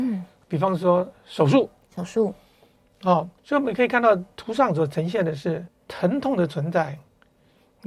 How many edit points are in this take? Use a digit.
2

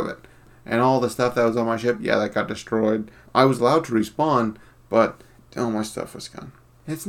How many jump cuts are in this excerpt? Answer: 0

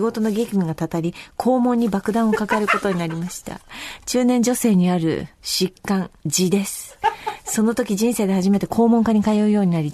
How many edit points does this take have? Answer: 1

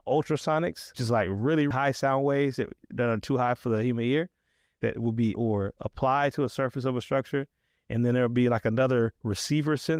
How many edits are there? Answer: 3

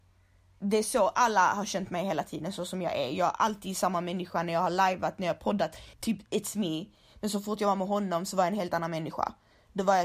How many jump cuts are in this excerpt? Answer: 1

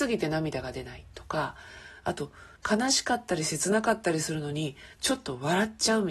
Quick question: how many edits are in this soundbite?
1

